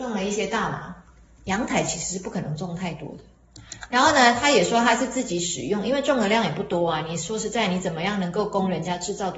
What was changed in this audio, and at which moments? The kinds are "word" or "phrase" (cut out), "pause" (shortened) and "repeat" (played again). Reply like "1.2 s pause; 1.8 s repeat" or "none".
none

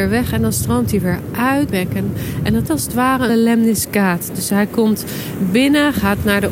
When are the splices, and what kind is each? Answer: 1.7 s word; 2.7 s word; 3.3 s word

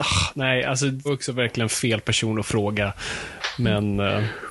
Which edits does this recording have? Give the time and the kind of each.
1.1 s word

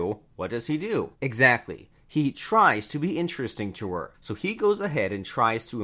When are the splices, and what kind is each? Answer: 1.1 s pause; 4.1 s pause

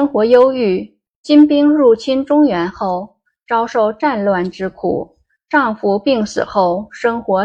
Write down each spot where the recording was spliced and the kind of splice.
none

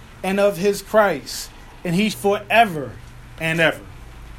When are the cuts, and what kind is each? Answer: 2.1 s phrase

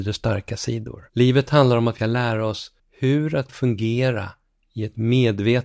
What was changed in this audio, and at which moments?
1.1 s pause; 2.0 s word; 2.8 s pause; 3.5 s word

